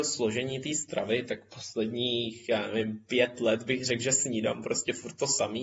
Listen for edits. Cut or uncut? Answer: uncut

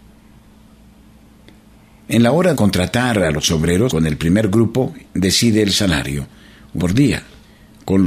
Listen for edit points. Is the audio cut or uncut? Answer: cut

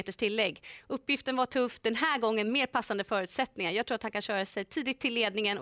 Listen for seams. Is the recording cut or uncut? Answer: uncut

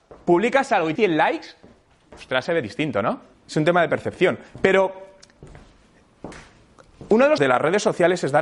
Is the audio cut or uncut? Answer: cut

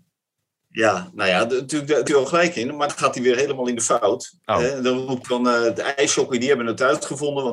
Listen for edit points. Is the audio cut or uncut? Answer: cut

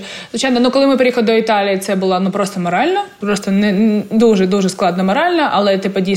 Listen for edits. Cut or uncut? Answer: uncut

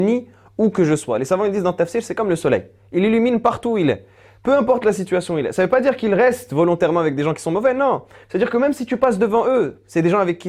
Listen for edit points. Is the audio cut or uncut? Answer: uncut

